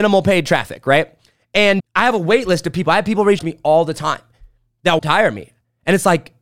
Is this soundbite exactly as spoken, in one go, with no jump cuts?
no; 3 cuts; at 1.8 s, 3.4 s, 5.0 s

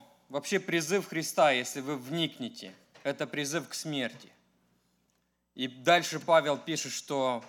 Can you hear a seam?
no; 0 cuts

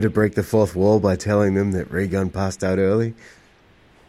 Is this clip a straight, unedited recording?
yes; 0 cuts

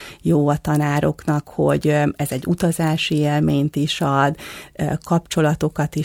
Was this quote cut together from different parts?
no; 0 cuts

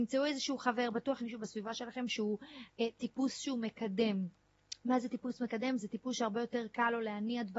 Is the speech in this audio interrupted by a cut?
yes; 1 cut; at 1.2 s

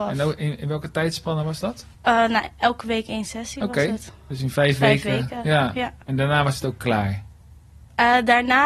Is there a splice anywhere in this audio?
yes; 2 cuts; at 1.9 s, 6.0 s

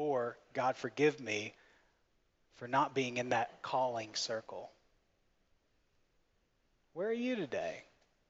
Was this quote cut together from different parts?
no; 0 cuts

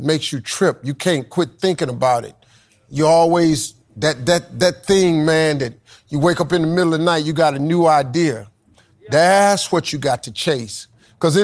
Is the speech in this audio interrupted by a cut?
no; 0 cuts

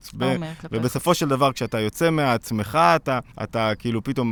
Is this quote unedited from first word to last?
no; 1 cut; at 3.3 s

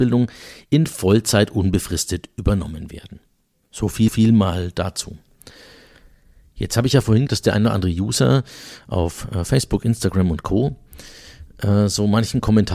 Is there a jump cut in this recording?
yes; 2 cuts; at 4.1 s, 7.3 s

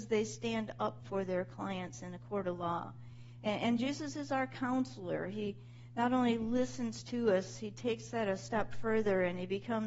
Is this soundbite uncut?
yes; 0 cuts

